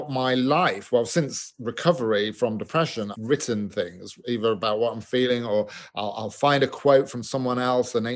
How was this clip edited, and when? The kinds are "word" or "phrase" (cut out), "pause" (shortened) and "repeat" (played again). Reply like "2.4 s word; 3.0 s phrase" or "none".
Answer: 3.1 s word